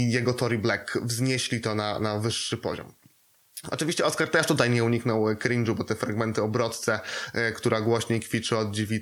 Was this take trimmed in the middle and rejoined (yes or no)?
no